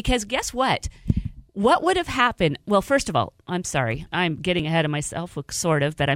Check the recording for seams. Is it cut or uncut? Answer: cut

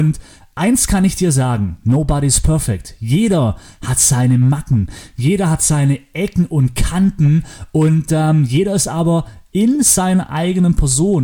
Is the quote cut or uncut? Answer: uncut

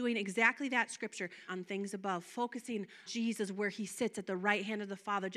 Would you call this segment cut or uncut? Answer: cut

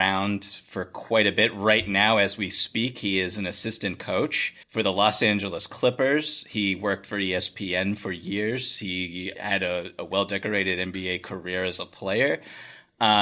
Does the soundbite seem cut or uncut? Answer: cut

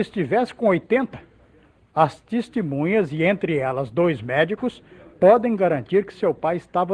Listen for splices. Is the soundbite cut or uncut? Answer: uncut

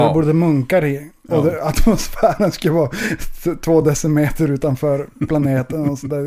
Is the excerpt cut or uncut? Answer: uncut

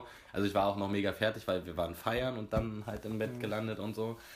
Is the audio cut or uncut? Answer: uncut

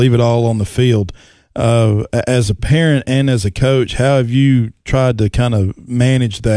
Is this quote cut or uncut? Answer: uncut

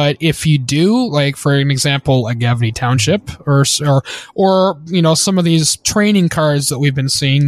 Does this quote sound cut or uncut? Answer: uncut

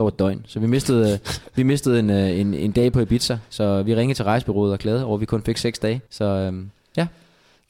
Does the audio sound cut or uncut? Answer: cut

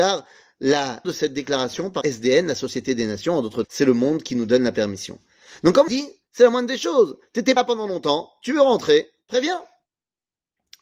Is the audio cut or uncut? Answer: cut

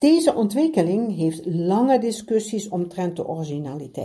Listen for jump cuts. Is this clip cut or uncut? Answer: uncut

